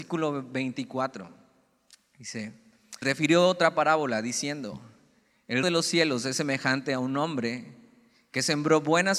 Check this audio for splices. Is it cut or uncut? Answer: cut